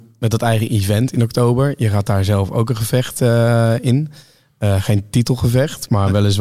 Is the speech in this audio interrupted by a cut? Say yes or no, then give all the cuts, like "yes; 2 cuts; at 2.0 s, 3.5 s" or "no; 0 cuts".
no; 0 cuts